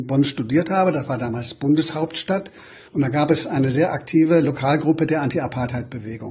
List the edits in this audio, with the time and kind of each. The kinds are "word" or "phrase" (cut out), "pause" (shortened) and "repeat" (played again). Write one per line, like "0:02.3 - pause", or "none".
0:02.9 - pause